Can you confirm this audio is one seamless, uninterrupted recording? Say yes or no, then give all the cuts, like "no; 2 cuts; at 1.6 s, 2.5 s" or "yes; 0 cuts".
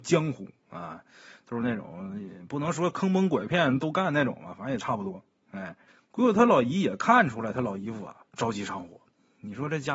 no; 1 cut; at 5.9 s